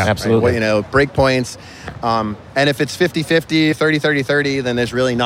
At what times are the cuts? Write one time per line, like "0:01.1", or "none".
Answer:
0:03.7